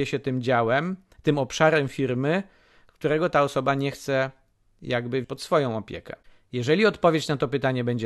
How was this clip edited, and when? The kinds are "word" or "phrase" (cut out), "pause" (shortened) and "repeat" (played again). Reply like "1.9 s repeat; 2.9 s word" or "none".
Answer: 5.2 s word